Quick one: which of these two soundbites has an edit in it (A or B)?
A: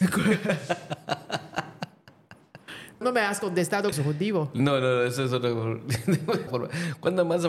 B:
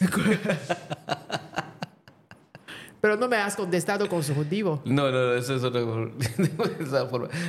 A